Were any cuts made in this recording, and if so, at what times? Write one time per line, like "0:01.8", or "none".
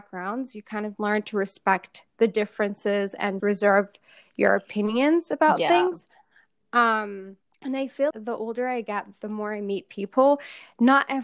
0:01.0
0:03.4
0:07.4
0:08.1